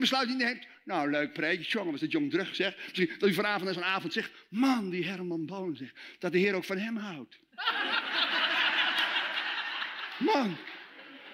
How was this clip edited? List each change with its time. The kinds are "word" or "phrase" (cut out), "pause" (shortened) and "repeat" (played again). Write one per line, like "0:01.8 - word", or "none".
none